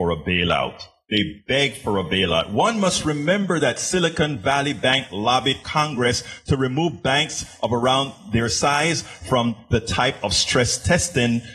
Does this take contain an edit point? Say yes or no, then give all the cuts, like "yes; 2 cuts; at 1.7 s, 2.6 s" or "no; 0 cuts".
no; 0 cuts